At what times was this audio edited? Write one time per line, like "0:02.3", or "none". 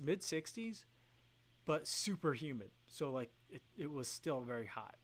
0:03.7